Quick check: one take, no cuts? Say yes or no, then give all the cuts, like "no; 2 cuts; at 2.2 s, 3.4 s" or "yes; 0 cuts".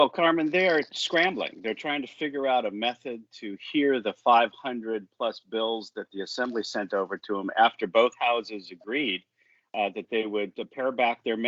yes; 0 cuts